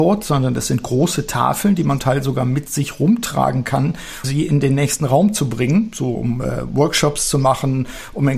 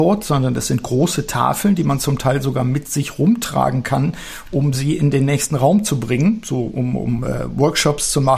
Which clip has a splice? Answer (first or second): first